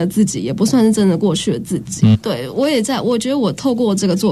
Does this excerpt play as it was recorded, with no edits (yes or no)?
no